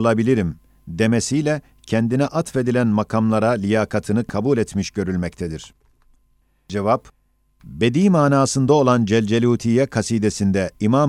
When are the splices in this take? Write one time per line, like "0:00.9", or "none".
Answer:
none